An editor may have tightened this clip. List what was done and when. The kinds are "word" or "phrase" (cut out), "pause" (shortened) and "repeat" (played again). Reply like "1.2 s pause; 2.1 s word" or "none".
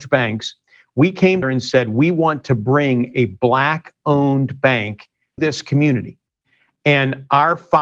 1.4 s word; 5.4 s word